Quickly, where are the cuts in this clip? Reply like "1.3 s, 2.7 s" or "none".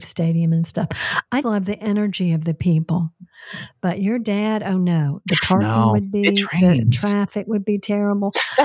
1.4 s